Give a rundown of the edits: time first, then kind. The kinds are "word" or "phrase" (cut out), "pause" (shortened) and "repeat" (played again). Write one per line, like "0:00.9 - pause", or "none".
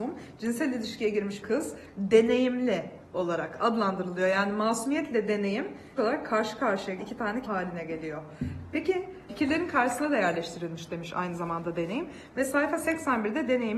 0:01.4 - word
0:01.9 - word
0:06.0 - word
0:07.0 - word
0:07.4 - word
0:09.3 - word